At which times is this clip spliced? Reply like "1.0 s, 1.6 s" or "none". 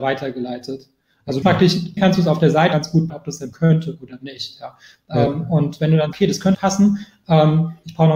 1.4 s, 2.0 s, 2.7 s, 3.1 s, 3.5 s, 6.1 s, 6.5 s